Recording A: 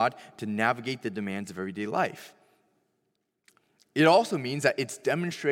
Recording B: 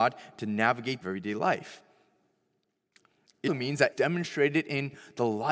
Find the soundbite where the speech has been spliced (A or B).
B